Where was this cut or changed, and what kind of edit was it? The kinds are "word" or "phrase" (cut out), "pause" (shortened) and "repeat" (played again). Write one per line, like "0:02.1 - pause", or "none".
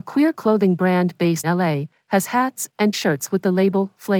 0:01.4 - word
0:02.9 - word